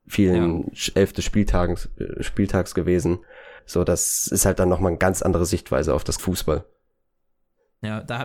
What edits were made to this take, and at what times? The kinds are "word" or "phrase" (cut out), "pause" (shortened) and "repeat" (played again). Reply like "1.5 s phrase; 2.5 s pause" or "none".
3.6 s pause; 6.2 s phrase